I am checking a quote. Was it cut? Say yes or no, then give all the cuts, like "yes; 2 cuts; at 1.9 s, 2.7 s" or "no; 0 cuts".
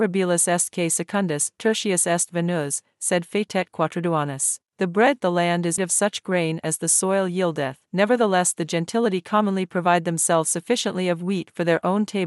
yes; 4 cuts; at 4.7 s, 5.2 s, 5.8 s, 7.9 s